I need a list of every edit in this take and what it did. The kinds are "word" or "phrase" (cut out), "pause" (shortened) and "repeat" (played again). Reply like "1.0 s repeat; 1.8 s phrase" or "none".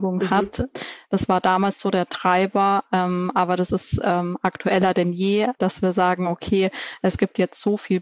none